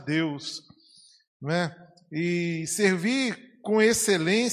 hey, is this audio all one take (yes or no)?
yes